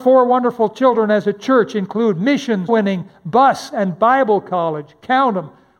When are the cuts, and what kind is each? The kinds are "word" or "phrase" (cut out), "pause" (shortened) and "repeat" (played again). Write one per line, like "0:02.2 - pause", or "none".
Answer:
0:02.7 - word